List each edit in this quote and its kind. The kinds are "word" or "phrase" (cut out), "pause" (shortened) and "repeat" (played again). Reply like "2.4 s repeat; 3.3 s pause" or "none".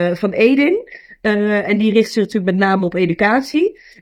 none